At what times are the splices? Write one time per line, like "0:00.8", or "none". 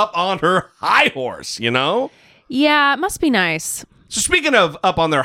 none